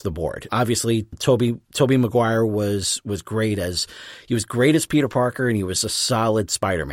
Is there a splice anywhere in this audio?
yes; 1 cut; at 1.6 s

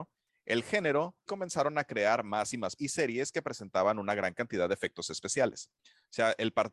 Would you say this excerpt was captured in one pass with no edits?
no; 2 cuts; at 1.3 s, 2.8 s

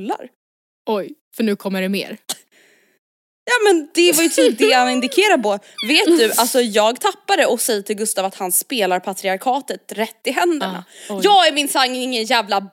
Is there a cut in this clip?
no; 0 cuts

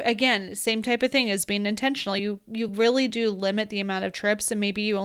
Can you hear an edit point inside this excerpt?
no; 0 cuts

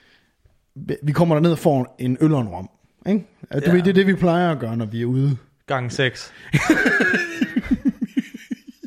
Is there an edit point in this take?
no; 0 cuts

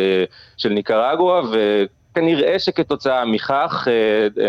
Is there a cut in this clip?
no; 0 cuts

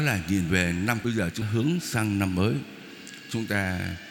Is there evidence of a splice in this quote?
yes; 2 cuts; at 1.0 s, 1.4 s

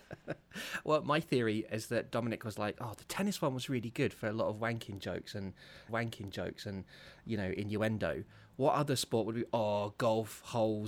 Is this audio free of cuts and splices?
no; 1 cut; at 5.9 s

